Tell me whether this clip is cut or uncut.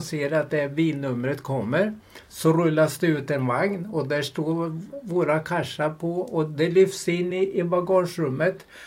uncut